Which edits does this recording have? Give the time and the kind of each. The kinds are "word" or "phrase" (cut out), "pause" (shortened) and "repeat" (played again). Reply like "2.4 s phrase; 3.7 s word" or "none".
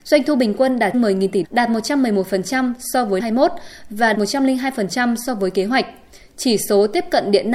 0.9 s word; 1.4 s word; 3.2 s word; 4.1 s word